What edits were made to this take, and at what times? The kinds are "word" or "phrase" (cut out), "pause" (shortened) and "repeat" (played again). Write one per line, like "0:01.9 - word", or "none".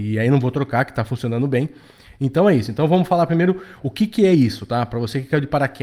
none